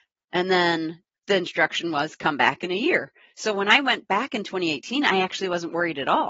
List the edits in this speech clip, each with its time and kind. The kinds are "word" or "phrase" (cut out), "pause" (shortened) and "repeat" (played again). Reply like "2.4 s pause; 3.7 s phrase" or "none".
none